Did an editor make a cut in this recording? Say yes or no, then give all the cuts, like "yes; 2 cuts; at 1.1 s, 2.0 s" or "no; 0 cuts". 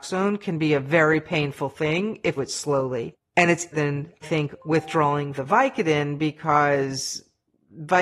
yes; 4 cuts; at 2.4 s, 3.7 s, 4.2 s, 5.4 s